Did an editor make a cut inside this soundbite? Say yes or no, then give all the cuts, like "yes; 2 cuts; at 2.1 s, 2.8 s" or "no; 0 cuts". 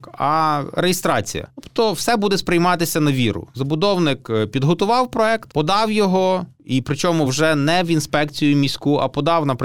no; 0 cuts